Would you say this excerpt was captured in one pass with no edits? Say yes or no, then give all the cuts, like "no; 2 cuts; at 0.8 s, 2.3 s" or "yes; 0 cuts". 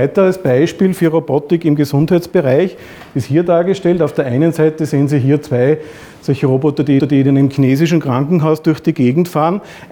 no; 1 cut; at 7.0 s